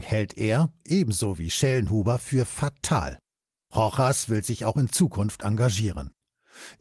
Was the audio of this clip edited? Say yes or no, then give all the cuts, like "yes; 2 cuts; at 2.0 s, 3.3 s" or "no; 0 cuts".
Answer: no; 0 cuts